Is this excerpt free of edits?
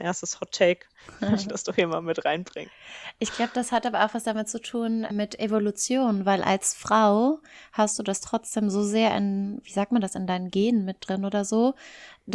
no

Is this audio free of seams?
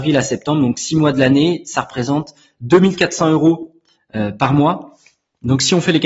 yes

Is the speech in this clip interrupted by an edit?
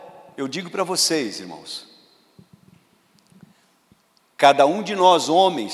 no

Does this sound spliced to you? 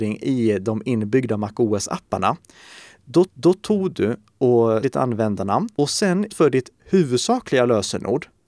yes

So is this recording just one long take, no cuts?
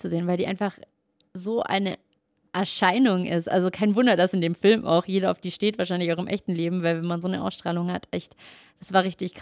yes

